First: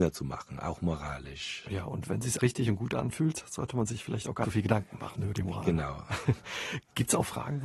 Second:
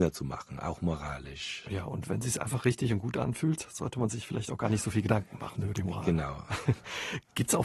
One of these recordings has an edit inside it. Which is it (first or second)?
first